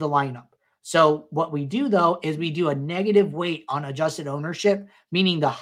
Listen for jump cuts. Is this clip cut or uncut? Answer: uncut